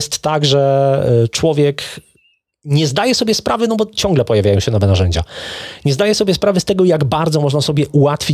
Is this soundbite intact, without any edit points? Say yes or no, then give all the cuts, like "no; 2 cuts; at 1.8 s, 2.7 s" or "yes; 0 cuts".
yes; 0 cuts